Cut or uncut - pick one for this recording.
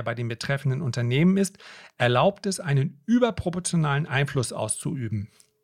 uncut